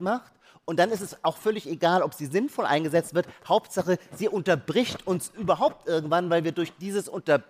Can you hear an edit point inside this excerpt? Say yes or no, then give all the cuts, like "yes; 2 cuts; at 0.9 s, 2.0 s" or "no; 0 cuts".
no; 0 cuts